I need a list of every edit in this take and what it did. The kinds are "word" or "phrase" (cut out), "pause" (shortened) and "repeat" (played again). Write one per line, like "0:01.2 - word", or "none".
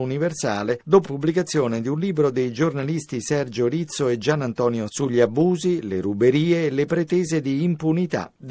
0:01.0 - word
0:04.9 - word